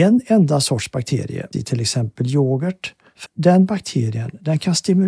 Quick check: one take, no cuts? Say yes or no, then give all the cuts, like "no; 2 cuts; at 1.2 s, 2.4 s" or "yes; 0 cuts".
no; 2 cuts; at 1.5 s, 3.3 s